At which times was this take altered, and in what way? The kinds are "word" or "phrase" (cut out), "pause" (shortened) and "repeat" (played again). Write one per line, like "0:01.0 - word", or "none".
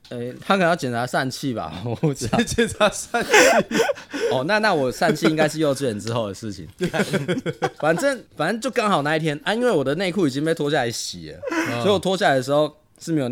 0:08.3 - pause